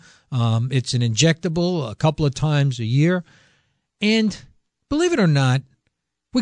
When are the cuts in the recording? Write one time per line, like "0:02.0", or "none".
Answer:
none

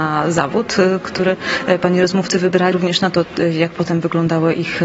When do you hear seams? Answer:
0:02.7

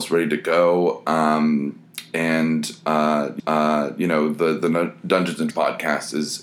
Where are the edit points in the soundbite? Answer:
0:03.4
0:05.5

